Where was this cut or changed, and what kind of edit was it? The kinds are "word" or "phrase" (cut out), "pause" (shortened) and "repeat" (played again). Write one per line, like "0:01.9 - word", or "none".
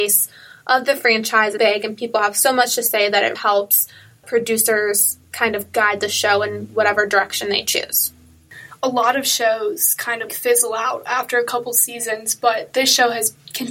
0:01.6 - word
0:03.4 - word
0:10.3 - word